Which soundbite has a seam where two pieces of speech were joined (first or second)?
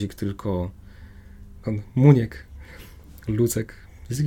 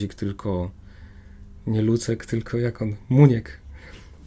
first